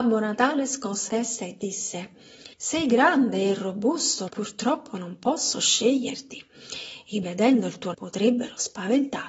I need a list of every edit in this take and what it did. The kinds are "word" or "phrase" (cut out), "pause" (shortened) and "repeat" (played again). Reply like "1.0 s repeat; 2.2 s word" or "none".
1.1 s word; 2.5 s pause; 4.3 s word; 7.2 s word; 7.9 s word